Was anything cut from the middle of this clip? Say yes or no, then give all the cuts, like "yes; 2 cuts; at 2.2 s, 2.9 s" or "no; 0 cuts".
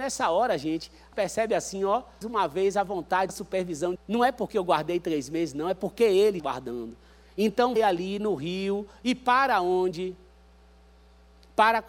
yes; 6 cuts; at 1.1 s, 2.2 s, 3.3 s, 4.0 s, 6.4 s, 7.8 s